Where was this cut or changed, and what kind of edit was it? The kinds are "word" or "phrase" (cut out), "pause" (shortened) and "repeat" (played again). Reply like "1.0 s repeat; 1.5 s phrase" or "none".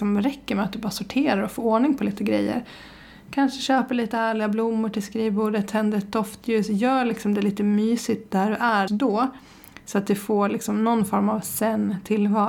8.9 s word